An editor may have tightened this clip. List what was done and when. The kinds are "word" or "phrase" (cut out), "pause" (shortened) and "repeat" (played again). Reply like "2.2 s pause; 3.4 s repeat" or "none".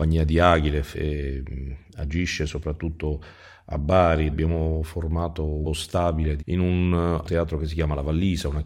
0.9 s word; 4.3 s word; 5.6 s word; 6.4 s word; 7.2 s word